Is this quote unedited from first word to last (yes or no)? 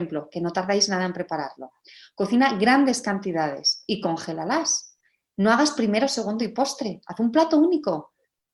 yes